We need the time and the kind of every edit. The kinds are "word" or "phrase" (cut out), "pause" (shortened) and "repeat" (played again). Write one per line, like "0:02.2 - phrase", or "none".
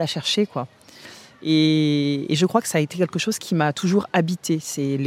none